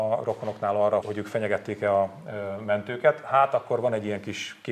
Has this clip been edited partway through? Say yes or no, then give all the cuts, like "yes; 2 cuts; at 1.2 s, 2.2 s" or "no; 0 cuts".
yes; 1 cut; at 1.0 s